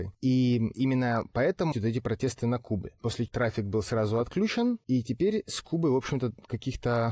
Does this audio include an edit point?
yes; 2 cuts; at 1.7 s, 3.3 s

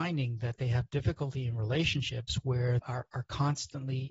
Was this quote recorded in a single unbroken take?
no; 1 cut; at 2.8 s

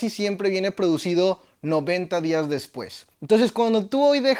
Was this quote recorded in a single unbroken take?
no; 1 cut; at 3.1 s

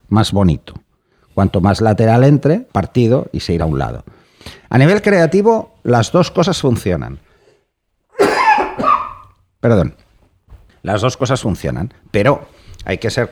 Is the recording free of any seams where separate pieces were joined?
no; 3 cuts; at 2.7 s, 3.6 s, 10.7 s

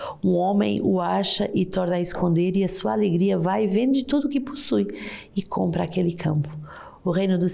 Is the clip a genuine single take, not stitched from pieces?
yes; 0 cuts

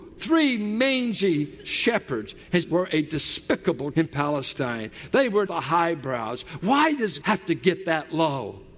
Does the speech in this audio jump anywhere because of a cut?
yes; 4 cuts; at 2.6 s, 3.9 s, 5.5 s, 7.2 s

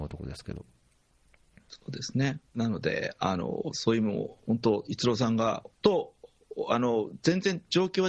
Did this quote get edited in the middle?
yes; 2 cuts; at 2.5 s, 5.7 s

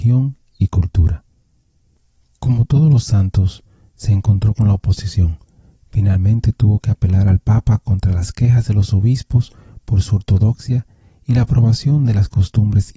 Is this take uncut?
yes; 0 cuts

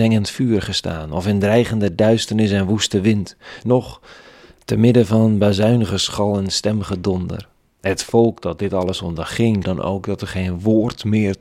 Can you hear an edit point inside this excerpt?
yes; 2 cuts; at 7.6 s, 9.6 s

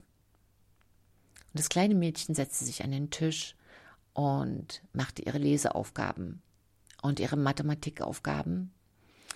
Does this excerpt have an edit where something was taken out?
no; 0 cuts

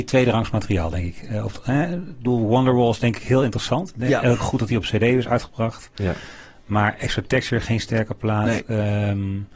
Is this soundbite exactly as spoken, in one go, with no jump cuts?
yes; 0 cuts

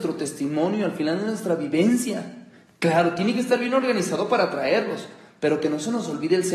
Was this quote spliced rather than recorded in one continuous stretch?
no; 0 cuts

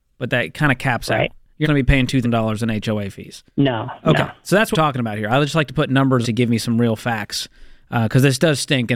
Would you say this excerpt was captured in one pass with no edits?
no; 5 cuts; at 1.6 s, 2.2 s, 3.5 s, 4.7 s, 6.2 s

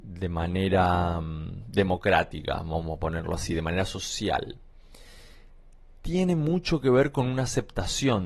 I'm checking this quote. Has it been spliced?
no; 0 cuts

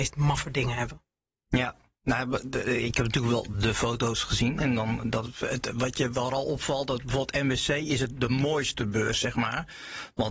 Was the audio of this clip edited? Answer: no; 0 cuts

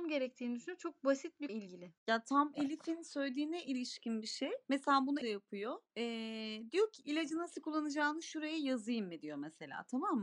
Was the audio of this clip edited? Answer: yes; 5 cuts; at 1.5 s, 2.0 s, 4.6 s, 5.2 s, 5.9 s

